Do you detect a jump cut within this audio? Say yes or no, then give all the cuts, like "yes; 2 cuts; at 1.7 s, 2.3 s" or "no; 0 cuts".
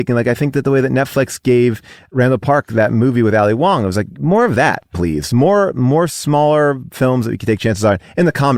no; 0 cuts